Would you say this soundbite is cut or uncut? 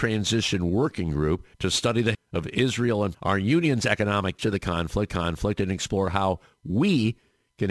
cut